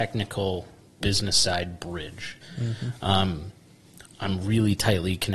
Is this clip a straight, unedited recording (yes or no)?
yes